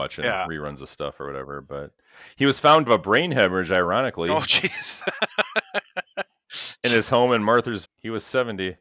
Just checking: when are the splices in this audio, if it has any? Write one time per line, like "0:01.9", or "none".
0:02.9
0:06.8
0:07.8